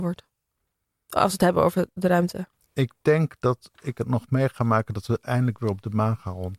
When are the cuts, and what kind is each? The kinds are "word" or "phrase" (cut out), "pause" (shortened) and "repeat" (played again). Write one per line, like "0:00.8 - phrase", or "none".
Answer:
0:02.6 - pause